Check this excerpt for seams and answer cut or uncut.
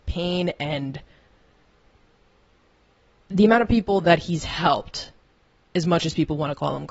uncut